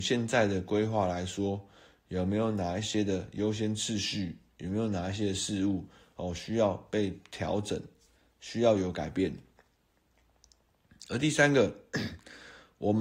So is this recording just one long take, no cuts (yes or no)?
yes